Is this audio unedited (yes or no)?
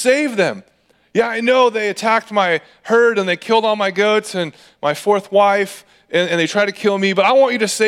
yes